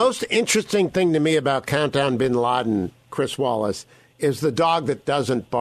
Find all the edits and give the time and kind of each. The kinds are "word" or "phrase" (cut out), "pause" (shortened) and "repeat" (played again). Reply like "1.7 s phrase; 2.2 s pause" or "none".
none